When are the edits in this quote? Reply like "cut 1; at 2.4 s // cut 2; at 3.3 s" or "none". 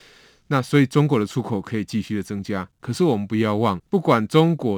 cut 1; at 2.7 s // cut 2; at 3.9 s